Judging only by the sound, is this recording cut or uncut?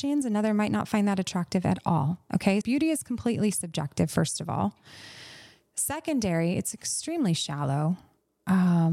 cut